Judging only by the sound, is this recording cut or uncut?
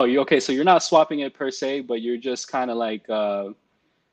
uncut